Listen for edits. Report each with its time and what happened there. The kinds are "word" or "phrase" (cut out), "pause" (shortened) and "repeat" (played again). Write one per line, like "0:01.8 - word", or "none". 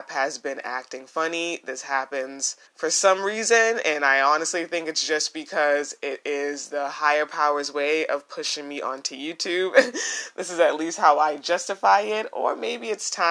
0:02.7 - pause